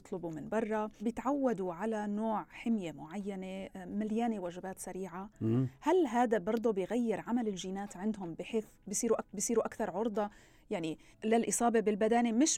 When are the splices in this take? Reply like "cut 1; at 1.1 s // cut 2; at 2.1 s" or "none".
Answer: cut 1; at 1.0 s // cut 2; at 9.2 s // cut 3; at 11.1 s